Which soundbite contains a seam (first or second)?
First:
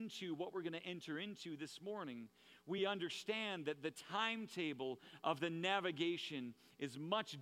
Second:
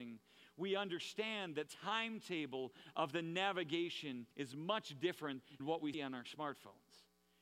second